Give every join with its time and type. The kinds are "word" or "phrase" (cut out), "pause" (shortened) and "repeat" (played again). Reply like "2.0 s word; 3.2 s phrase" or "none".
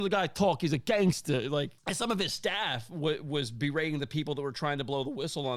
1.8 s pause